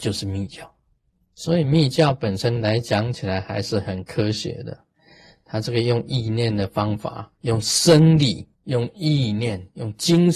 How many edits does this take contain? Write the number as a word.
two